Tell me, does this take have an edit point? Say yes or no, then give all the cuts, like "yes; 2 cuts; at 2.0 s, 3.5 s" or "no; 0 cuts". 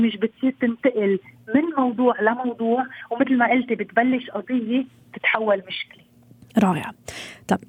no; 0 cuts